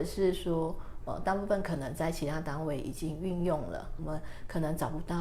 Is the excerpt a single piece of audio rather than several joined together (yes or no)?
no